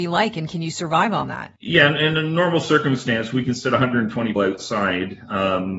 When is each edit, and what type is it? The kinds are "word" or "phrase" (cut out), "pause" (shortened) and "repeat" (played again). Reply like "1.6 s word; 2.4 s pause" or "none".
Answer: 1.6 s pause; 4.4 s word